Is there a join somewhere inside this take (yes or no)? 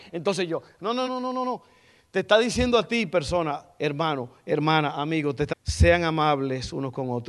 yes